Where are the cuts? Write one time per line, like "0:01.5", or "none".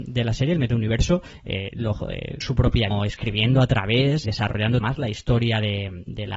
0:02.4
0:02.9
0:04.2
0:04.8